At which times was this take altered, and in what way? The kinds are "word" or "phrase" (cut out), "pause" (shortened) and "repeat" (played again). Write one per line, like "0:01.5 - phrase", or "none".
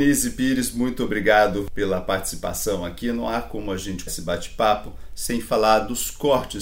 0:04.1 - word